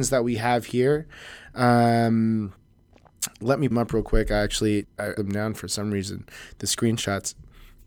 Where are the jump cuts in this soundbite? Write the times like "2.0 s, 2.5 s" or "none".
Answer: 3.7 s, 4.8 s, 5.2 s